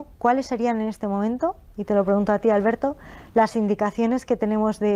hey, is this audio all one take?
yes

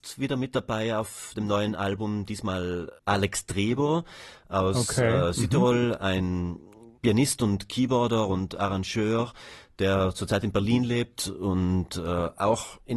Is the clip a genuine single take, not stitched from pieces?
no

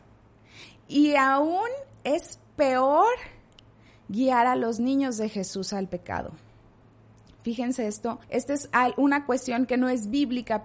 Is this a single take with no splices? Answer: no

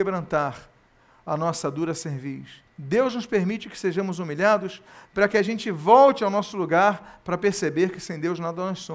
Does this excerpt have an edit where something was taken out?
yes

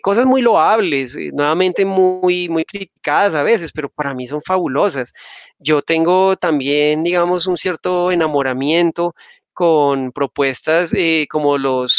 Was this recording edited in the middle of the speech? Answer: no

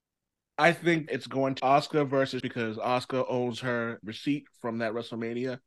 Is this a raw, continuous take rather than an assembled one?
no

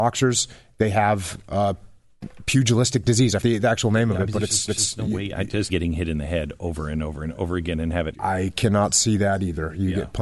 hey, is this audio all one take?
no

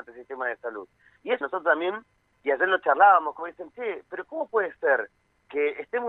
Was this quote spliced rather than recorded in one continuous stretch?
yes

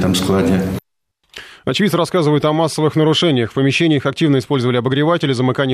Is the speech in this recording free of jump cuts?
yes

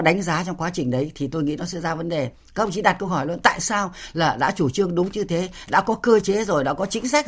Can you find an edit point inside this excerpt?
no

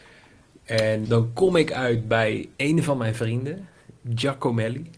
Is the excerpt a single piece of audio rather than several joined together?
no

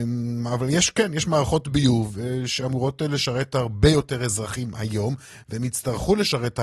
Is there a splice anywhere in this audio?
no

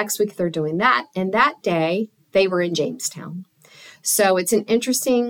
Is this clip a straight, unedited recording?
yes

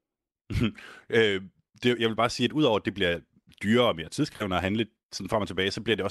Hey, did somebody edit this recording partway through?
no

